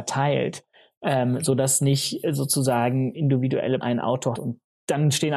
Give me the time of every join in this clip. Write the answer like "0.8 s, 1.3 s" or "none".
3.1 s, 3.8 s, 4.3 s